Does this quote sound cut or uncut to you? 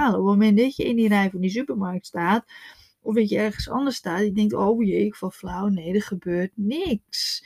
uncut